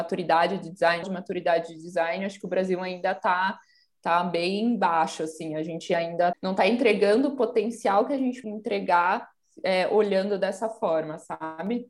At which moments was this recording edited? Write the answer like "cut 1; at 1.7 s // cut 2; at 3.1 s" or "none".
cut 1; at 1.0 s // cut 2; at 6.3 s // cut 3; at 8.4 s

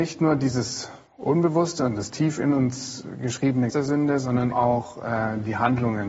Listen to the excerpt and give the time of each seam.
cut 1; at 1.1 s // cut 2; at 3.7 s // cut 3; at 4.5 s

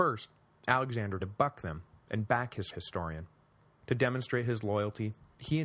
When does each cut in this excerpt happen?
cut 1; at 1.2 s // cut 2; at 2.7 s // cut 3; at 3.7 s

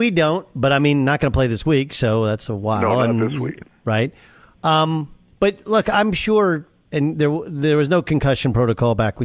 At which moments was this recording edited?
none

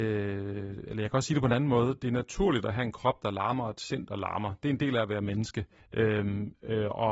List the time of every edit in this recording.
cut 1; at 5.8 s

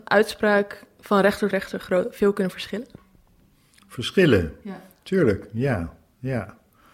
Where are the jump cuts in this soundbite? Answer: cut 1; at 1.5 s

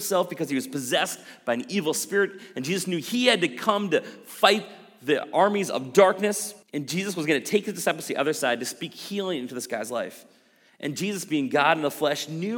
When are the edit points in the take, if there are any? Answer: cut 1; at 6.6 s

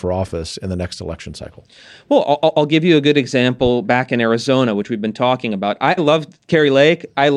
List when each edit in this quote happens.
cut 1; at 6.0 s

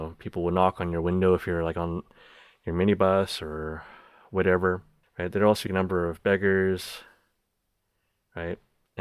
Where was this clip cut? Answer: cut 1; at 5.0 s // cut 2; at 5.7 s

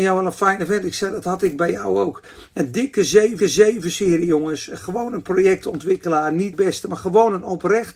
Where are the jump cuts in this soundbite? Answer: cut 1; at 3.4 s // cut 2; at 6.5 s

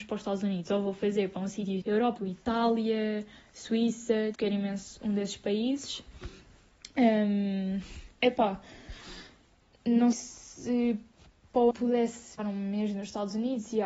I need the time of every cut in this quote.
cut 1; at 1.8 s // cut 2; at 2.2 s // cut 3; at 4.3 s // cut 4; at 10.1 s // cut 5; at 11.7 s // cut 6; at 12.4 s

